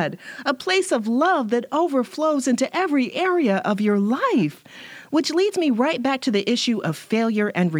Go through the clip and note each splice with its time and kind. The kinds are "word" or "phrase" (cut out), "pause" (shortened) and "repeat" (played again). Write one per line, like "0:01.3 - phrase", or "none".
none